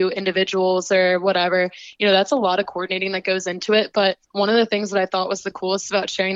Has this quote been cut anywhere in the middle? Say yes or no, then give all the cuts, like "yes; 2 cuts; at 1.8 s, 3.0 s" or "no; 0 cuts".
yes; 1 cut; at 4.2 s